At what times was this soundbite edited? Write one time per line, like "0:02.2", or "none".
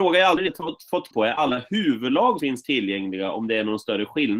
0:01.1
0:02.4